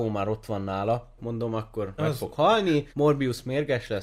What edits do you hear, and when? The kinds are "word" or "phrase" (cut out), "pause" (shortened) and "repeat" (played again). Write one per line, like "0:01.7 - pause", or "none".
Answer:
0:01.2 - word
0:02.0 - word
0:02.9 - pause

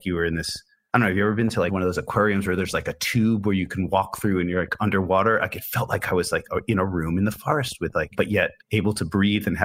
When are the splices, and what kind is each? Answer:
0:08.6 - pause

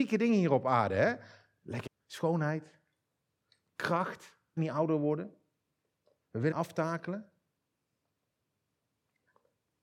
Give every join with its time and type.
0:01.9 - word
0:04.6 - word
0:06.5 - word

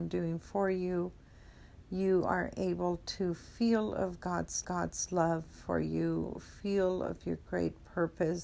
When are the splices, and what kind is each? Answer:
0:04.6 - repeat

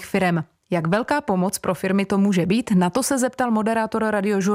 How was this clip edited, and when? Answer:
none

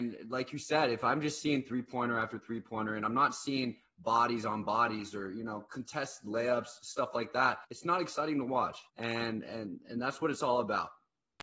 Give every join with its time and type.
0:07.6 - pause
0:08.9 - pause

